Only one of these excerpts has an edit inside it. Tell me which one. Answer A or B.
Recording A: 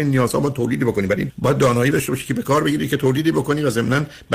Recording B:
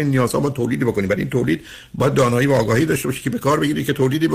A